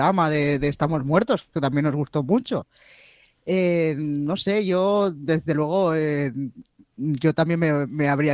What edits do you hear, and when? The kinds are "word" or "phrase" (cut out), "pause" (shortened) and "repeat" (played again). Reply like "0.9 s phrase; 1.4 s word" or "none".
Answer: none